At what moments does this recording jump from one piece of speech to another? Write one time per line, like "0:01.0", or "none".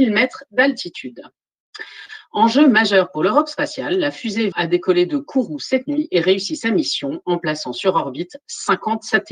0:04.5